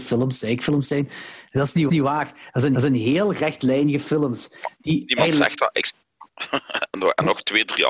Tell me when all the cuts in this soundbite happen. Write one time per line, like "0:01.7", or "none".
0:01.9
0:02.7